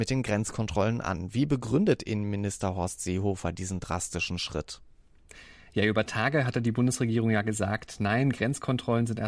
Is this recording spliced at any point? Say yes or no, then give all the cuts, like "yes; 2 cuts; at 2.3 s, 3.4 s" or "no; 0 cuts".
no; 0 cuts